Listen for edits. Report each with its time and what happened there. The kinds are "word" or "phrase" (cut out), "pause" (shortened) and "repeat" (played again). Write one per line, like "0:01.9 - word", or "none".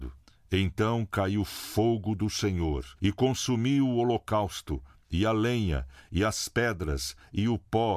0:03.0 - pause